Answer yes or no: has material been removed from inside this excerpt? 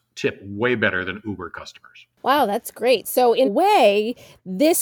yes